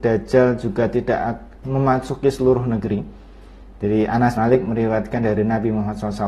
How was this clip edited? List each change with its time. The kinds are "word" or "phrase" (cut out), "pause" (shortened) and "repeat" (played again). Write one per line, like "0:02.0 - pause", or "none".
0:01.6 - word
0:04.4 - word